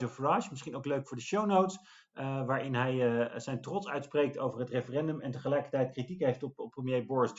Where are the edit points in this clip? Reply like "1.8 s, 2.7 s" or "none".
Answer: none

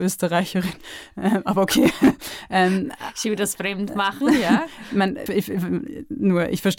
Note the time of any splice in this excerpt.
5.3 s

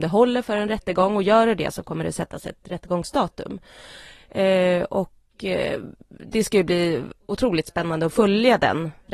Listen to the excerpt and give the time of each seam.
none

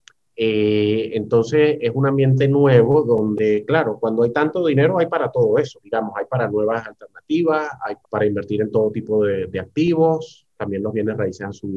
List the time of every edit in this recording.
5.8 s, 8.0 s

